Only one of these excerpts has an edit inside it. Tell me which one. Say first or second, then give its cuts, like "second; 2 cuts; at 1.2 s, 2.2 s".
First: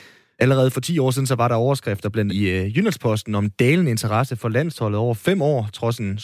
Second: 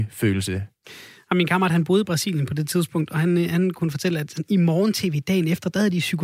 first; 1 cut; at 2.3 s